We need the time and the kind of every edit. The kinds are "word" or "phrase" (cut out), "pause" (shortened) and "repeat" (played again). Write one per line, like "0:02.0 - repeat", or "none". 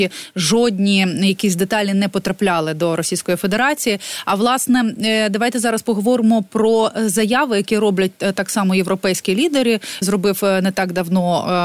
0:10.0 - word

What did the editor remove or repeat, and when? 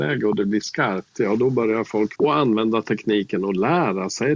0:02.2 - word

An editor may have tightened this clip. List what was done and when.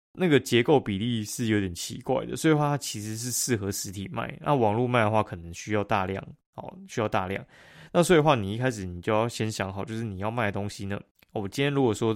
0:11.1 - pause

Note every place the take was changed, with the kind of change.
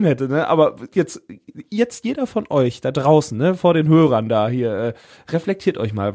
none

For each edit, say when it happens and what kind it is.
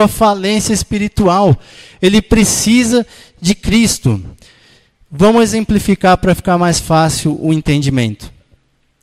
none

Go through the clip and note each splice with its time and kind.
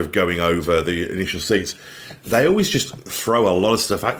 none

